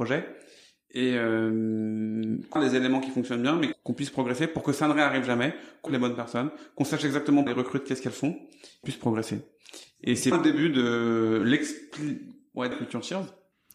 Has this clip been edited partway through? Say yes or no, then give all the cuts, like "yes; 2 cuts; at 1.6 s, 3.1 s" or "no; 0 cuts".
yes; 7 cuts; at 2.6 s, 3.7 s, 5.9 s, 7.5 s, 8.8 s, 10.3 s, 12.7 s